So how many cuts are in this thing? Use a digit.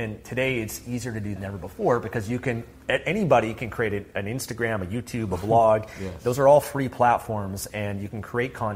1